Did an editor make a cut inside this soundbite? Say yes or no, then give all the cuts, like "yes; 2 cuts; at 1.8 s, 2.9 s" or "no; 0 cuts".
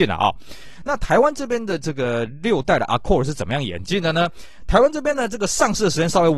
no; 0 cuts